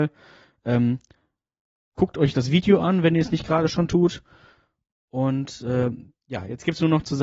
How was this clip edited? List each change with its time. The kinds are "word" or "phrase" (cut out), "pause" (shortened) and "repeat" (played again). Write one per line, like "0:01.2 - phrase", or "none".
none